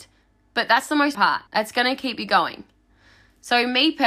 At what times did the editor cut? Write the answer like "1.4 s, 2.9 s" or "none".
1.1 s, 1.5 s